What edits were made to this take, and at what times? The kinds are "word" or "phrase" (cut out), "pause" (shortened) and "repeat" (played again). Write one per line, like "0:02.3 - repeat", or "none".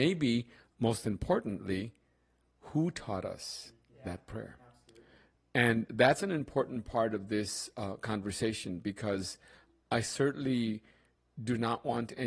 none